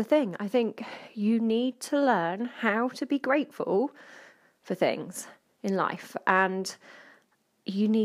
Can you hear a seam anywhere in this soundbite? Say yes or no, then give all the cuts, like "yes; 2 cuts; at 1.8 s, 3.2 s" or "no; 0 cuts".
no; 0 cuts